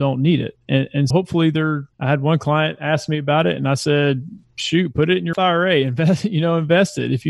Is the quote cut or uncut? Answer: cut